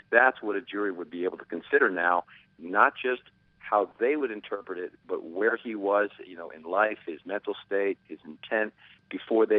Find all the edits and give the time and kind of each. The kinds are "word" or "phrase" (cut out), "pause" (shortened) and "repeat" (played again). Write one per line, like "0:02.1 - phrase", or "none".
none